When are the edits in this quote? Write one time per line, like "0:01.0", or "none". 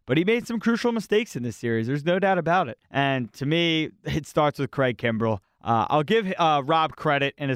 0:02.8
0:05.4